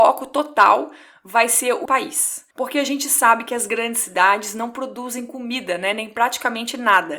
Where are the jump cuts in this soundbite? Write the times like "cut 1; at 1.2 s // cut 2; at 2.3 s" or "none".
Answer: cut 1; at 1.9 s // cut 2; at 2.5 s